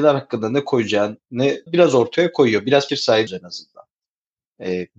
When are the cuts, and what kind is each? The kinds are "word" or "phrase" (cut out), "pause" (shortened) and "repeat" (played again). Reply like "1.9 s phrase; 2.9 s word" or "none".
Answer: 1.7 s word; 2.9 s word; 3.3 s word